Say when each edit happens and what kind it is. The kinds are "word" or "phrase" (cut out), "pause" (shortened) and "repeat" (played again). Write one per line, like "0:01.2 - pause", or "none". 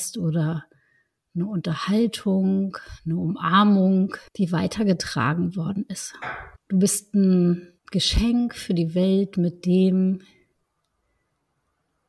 0:04.3 - pause
0:06.6 - pause
0:07.8 - pause